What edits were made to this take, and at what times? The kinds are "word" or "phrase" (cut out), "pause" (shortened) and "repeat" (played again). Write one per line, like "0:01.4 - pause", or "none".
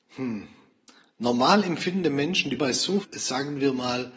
0:02.6 - word
0:03.0 - word